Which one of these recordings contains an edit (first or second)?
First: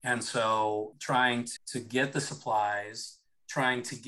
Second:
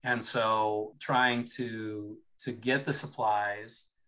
first